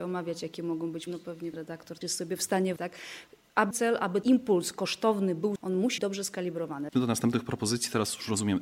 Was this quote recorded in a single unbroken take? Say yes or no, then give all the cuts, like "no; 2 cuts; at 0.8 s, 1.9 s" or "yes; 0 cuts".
no; 9 cuts; at 1.1 s, 1.5 s, 2.0 s, 2.8 s, 3.7 s, 4.2 s, 5.6 s, 6.0 s, 6.9 s